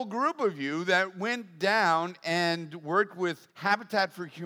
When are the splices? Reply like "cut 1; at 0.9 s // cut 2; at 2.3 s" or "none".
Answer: cut 1; at 3.5 s